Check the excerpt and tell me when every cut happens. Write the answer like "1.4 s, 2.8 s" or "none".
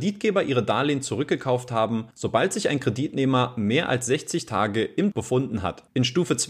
5.1 s